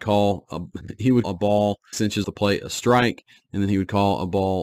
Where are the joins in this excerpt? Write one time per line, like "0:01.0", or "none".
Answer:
0:01.2
0:01.9
0:02.2